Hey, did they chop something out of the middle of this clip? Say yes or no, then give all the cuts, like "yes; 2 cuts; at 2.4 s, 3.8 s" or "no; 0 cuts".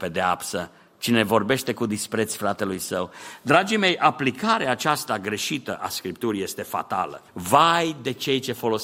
yes; 1 cut; at 7.3 s